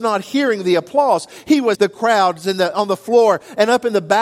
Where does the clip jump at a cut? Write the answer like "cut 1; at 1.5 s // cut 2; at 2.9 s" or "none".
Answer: cut 1; at 1.7 s